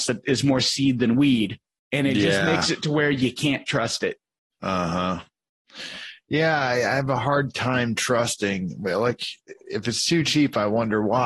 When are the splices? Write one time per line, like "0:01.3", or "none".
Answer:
none